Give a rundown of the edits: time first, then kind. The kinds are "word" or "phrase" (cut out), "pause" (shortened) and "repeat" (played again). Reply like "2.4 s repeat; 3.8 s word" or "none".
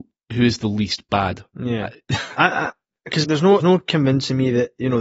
1.5 s pause; 3.2 s word; 3.6 s word